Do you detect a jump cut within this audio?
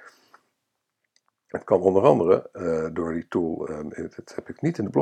no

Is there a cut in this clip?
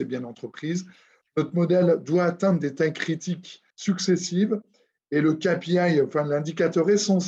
yes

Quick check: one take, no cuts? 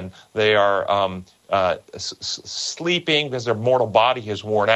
yes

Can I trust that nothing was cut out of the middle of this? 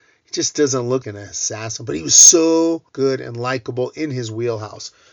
no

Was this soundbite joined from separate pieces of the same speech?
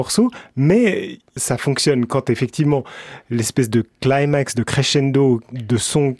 no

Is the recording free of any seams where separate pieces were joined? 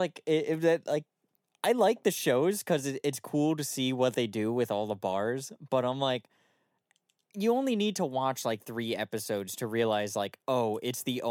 yes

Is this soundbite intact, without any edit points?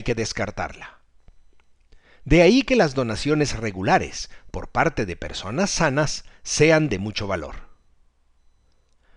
yes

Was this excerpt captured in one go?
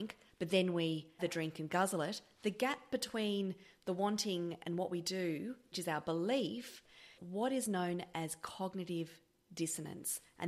no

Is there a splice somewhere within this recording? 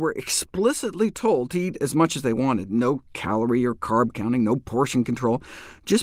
no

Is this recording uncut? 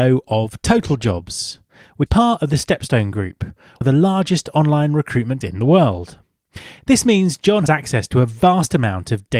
no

